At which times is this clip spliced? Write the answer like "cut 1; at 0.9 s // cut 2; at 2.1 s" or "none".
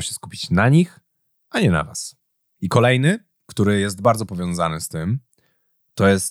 none